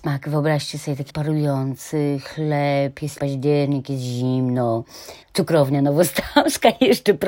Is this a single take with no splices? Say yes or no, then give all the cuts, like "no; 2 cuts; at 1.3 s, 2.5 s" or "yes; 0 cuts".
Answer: no; 3 cuts; at 1.1 s, 3.2 s, 5.2 s